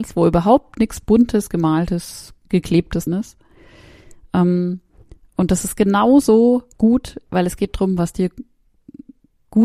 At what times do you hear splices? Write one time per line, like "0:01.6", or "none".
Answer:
0:01.5
0:03.1
0:06.7